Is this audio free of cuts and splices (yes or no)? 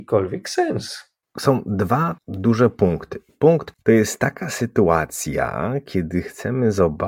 no